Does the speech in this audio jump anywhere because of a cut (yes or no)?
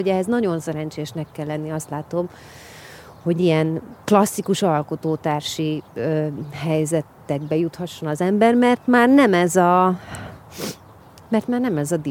yes